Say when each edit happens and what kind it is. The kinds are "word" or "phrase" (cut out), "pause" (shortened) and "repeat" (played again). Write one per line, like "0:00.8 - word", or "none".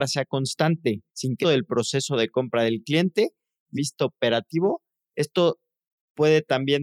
0:01.1 - pause
0:01.4 - phrase
0:03.8 - phrase